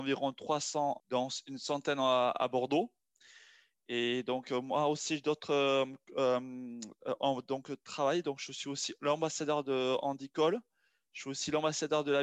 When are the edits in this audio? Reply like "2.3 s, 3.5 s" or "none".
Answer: 1.0 s

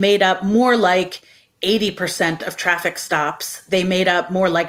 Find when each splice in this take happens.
none

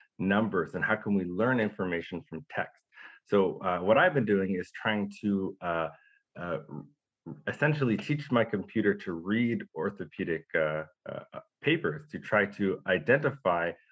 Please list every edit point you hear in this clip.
none

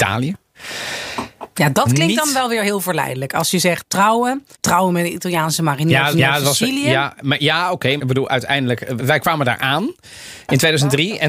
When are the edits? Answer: 4.5 s, 6.1 s, 8.0 s, 9.0 s

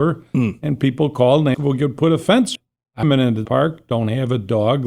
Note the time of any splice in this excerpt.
1.5 s, 2.6 s, 3.0 s, 3.4 s

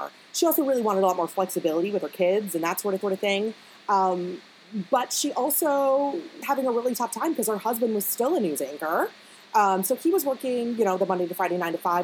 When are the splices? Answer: 3.0 s, 6.4 s

